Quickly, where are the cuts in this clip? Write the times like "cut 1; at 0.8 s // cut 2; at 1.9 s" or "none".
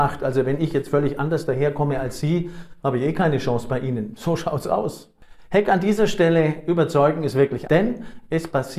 cut 1; at 7.7 s